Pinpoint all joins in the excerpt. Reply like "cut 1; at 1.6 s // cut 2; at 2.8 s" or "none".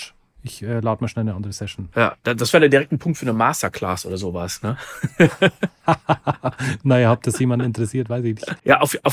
none